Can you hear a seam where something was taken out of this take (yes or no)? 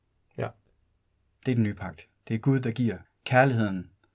yes